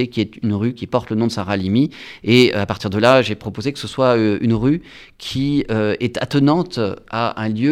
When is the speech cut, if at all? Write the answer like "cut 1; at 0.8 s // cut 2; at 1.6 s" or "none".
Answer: none